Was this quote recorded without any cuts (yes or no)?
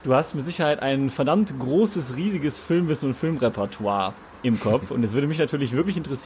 yes